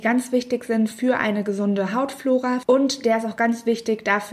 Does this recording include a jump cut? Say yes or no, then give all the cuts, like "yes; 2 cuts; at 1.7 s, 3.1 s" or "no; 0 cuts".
no; 0 cuts